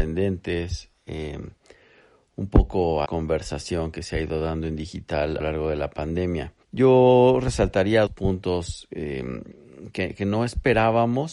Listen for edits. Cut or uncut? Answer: cut